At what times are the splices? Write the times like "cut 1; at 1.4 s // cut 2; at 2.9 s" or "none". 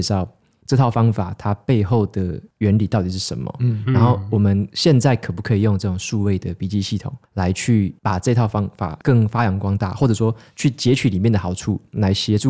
cut 1; at 7.2 s // cut 2; at 8.0 s